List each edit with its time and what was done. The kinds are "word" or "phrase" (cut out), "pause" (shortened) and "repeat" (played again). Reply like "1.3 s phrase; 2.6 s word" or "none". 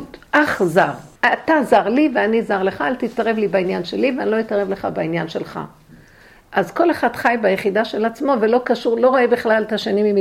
1.2 s pause